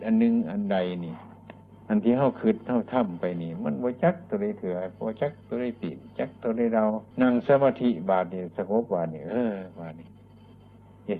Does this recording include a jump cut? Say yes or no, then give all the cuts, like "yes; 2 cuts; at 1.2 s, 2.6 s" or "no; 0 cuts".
yes; 2 cuts; at 1.8 s, 7.1 s